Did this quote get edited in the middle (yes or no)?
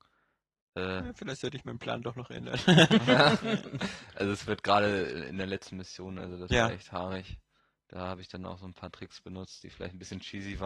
no